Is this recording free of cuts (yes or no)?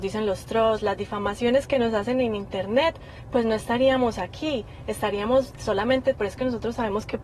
no